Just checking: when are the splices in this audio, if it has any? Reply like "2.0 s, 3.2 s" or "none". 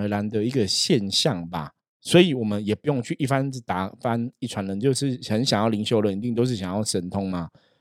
1.8 s